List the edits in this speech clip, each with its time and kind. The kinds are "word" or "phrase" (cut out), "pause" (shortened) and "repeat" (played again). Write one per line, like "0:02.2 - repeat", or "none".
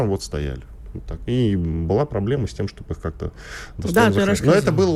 none